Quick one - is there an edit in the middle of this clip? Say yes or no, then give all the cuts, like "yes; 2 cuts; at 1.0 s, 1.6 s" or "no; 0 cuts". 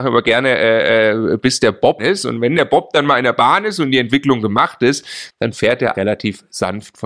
yes; 2 cuts; at 2.0 s, 5.9 s